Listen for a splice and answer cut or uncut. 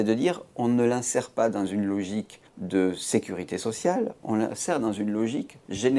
cut